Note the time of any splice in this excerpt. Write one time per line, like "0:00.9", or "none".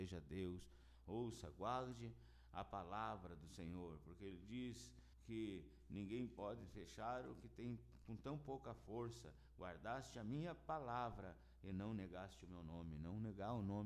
0:05.1